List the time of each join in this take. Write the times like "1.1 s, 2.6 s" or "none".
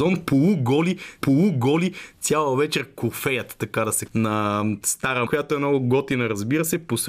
1.2 s, 4.1 s, 5.3 s